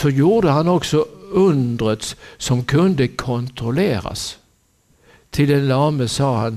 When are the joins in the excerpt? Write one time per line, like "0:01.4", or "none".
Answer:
none